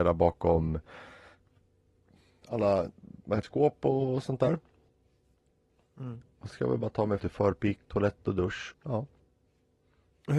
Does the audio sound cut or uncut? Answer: cut